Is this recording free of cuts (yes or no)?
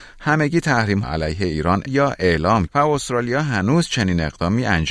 no